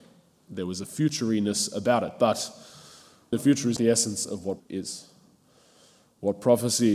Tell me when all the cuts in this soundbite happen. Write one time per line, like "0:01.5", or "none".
0:03.3
0:03.8
0:04.6